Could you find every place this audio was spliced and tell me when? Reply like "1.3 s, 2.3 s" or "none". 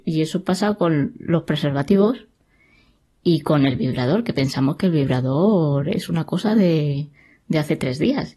none